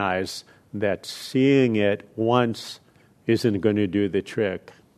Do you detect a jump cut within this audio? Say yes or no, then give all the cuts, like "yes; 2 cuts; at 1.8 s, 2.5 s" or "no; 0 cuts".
no; 0 cuts